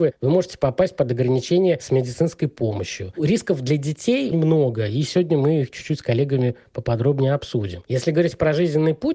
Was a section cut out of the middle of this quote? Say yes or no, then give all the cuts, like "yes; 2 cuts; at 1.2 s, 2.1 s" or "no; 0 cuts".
yes; 1 cut; at 4.3 s